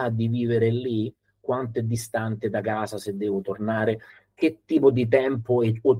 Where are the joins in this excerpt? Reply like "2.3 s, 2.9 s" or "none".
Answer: none